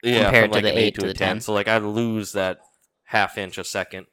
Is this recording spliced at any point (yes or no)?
no